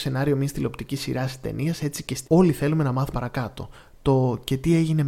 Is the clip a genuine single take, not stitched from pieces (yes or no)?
no